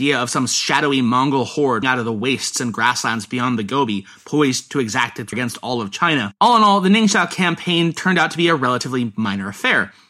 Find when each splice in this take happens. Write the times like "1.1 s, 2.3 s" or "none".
1.8 s, 5.3 s, 6.4 s

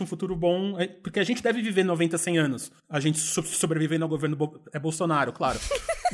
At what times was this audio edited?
2.8 s

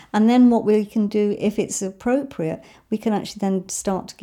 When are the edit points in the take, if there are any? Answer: none

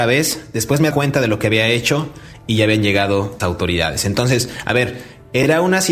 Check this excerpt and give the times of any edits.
0.9 s, 3.4 s

